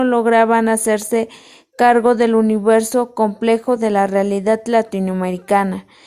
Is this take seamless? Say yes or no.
yes